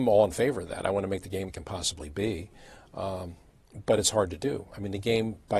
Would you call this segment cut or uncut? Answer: cut